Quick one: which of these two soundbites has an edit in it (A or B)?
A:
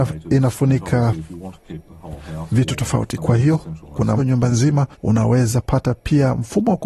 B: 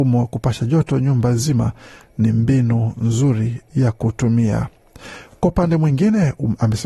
A